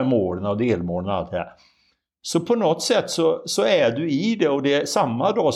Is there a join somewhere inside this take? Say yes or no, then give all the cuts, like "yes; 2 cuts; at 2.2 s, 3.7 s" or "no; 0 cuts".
no; 0 cuts